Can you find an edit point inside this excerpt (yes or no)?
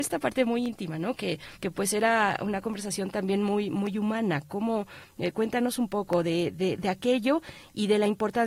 yes